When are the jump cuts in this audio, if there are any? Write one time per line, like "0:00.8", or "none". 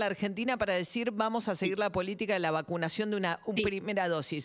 none